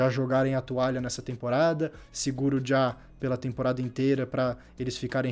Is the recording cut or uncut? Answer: uncut